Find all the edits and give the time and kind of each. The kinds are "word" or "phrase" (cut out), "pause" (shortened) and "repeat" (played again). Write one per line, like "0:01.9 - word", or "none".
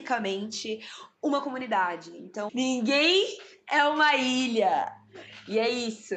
0:02.5 - word